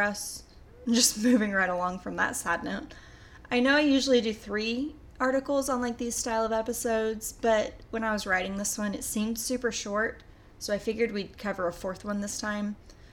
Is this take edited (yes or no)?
no